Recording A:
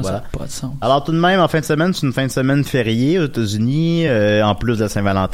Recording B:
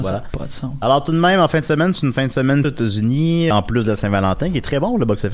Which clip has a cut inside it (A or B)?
B